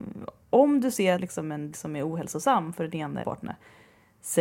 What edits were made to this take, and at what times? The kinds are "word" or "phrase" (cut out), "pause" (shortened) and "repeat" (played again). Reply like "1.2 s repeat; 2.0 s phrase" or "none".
1.2 s phrase; 1.7 s word; 3.2 s phrase